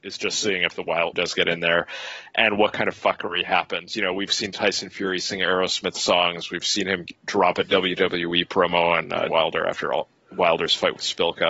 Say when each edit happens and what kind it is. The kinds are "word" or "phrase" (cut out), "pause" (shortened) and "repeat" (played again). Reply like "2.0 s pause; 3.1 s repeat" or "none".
1.1 s word; 9.3 s word